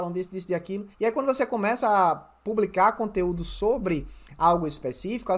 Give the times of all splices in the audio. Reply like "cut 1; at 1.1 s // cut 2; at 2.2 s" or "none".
cut 1; at 0.9 s